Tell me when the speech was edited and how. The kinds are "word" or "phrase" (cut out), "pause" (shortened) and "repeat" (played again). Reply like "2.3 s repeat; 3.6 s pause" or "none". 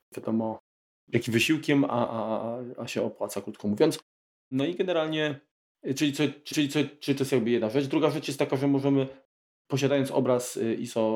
6.5 s repeat